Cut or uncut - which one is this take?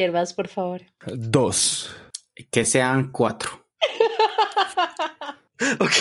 uncut